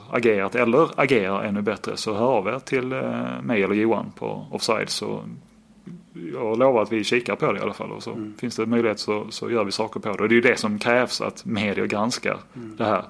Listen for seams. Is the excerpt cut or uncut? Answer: uncut